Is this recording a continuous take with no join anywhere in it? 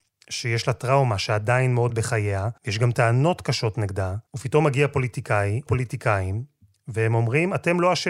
no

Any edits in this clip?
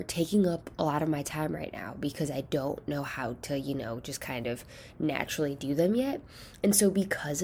no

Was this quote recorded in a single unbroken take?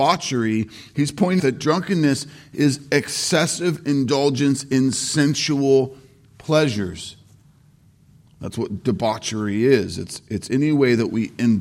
no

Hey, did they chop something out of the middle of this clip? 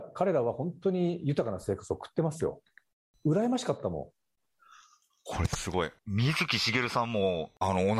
no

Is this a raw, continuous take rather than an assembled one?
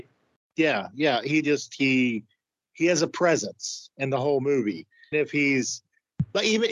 no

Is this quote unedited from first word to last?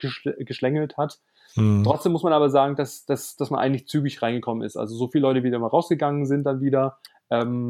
yes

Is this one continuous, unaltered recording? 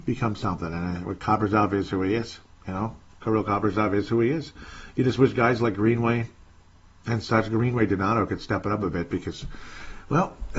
yes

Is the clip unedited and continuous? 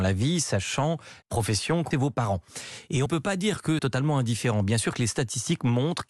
no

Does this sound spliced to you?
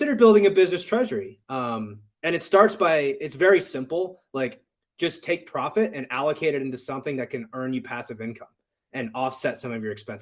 no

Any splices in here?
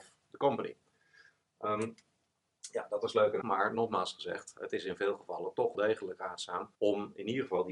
yes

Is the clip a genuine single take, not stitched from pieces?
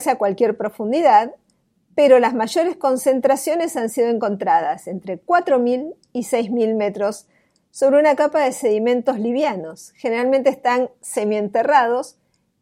yes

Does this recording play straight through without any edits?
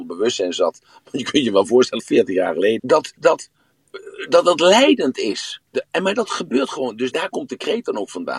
no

